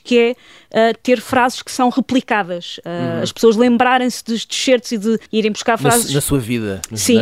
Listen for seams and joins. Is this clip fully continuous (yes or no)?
no